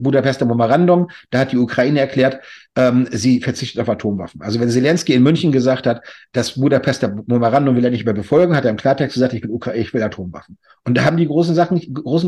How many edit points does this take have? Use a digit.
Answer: 0